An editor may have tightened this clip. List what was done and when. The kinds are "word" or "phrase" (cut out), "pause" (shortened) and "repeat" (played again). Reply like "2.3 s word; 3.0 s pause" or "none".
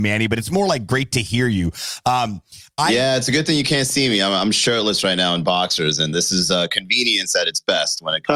6.1 s word